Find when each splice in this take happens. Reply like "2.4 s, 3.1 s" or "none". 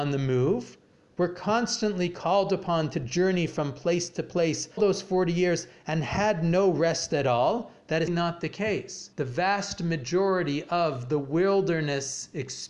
4.8 s, 8.1 s, 9.1 s